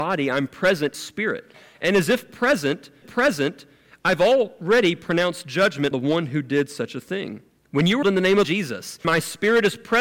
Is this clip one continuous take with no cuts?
no; 7 cuts; at 0.9 s, 3.0 s, 5.9 s, 7.6 s, 8.0 s, 8.4 s, 9.0 s

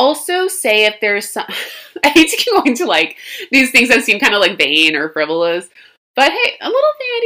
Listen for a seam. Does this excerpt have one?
no; 0 cuts

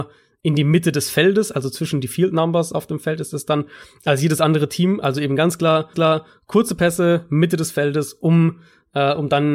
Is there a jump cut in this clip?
yes; 1 cut; at 5.9 s

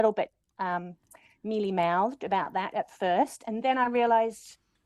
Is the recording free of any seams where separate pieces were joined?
yes; 0 cuts

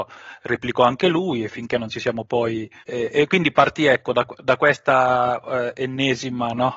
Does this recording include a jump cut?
yes; 1 cut; at 2.8 s

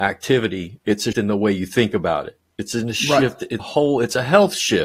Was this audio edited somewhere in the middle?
yes; 2 cuts; at 1.1 s, 3.6 s

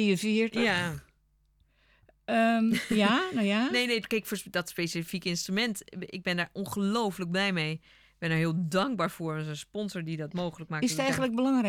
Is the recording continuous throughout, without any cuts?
yes; 0 cuts

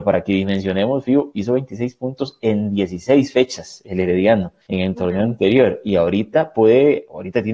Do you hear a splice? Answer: yes; 1 cut; at 4.6 s

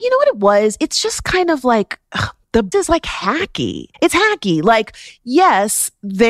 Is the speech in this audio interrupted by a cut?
yes; 2 cuts; at 2.7 s, 3.9 s

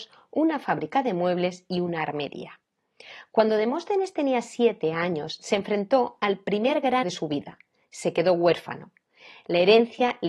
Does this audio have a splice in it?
yes; 1 cut; at 7.0 s

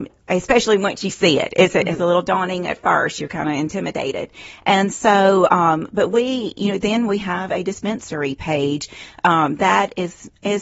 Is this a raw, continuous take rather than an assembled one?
yes; 0 cuts

